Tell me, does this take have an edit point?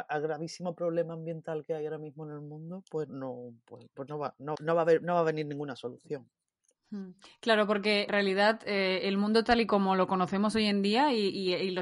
yes; 3 cuts; at 3.1 s, 4.5 s, 8.1 s

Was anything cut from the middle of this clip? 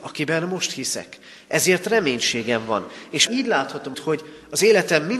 yes; 2 cuts; at 3.3 s, 3.9 s

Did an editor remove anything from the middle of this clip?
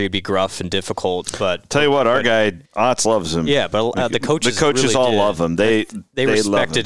yes; 1 cut; at 2.7 s

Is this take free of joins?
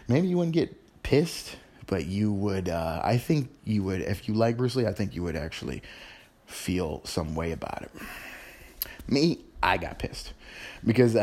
yes; 0 cuts

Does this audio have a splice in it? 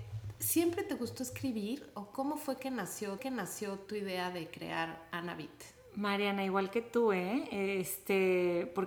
yes; 1 cut; at 3.2 s

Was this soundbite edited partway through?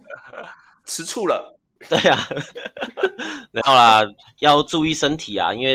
no; 0 cuts

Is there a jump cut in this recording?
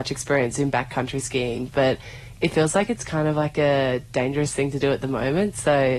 no; 0 cuts

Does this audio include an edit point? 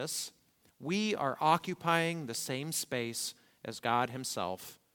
no; 0 cuts

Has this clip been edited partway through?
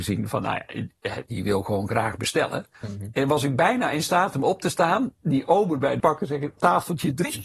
yes; 3 cuts; at 1.3 s, 2.7 s, 6.0 s

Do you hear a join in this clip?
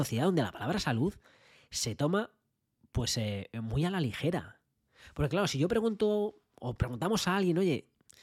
no; 0 cuts

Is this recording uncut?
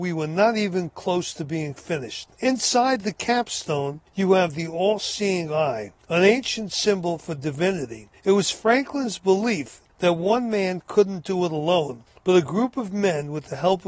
no; 1 cut; at 2.3 s

